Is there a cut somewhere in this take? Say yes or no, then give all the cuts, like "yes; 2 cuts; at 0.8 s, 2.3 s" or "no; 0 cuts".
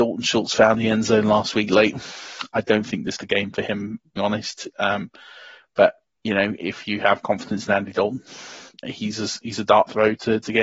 yes; 3 cuts; at 3.2 s, 4.2 s, 8.8 s